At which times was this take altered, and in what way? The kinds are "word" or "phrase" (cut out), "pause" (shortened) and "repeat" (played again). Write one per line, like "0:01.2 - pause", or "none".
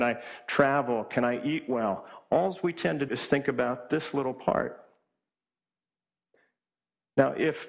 0:03.1 - word